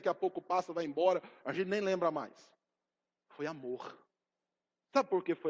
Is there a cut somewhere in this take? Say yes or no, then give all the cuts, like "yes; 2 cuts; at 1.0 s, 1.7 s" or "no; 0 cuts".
no; 0 cuts